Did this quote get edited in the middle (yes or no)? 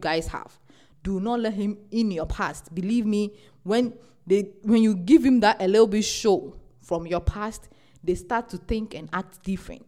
no